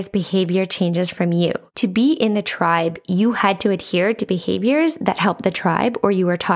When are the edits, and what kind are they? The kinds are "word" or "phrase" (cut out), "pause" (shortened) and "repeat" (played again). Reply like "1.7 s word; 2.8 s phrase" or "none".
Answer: 1.7 s pause